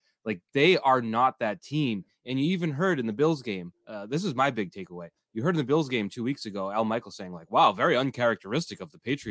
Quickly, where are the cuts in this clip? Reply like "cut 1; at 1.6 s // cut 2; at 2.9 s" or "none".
none